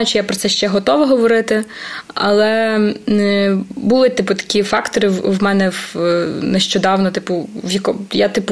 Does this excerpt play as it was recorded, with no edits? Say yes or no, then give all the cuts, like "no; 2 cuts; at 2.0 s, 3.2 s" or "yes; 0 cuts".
yes; 0 cuts